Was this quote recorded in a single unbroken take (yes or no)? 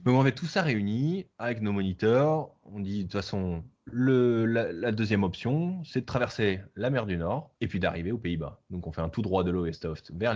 no